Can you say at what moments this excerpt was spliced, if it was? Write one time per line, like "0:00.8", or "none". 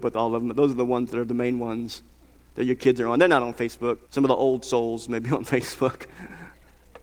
0:04.0